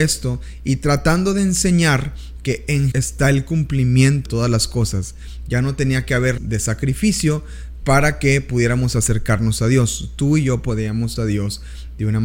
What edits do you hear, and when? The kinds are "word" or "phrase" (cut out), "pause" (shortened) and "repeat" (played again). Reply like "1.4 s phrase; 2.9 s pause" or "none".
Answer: 2.9 s word; 4.3 s word; 6.4 s word; 11.2 s word